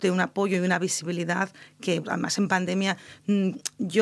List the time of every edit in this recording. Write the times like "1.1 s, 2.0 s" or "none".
2.0 s